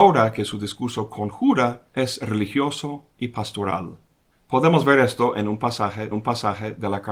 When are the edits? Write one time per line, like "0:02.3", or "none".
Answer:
0:01.9
0:04.3
0:06.1